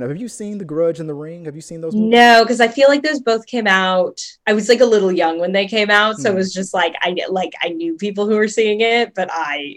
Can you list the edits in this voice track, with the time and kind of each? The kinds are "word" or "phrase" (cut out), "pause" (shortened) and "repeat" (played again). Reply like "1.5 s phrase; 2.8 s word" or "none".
4.4 s pause